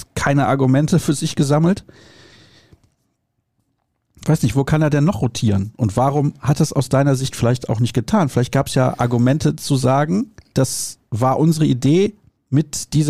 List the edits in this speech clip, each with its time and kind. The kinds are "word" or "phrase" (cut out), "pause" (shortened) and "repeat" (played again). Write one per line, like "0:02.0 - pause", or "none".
0:10.5 - word